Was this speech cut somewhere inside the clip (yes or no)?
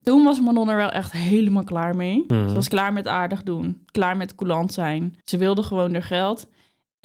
yes